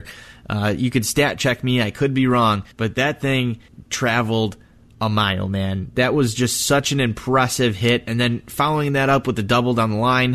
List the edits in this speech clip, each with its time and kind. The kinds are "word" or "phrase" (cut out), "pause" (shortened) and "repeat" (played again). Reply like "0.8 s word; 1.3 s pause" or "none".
2.7 s pause